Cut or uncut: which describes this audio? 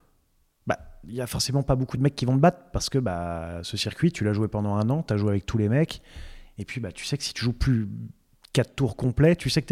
uncut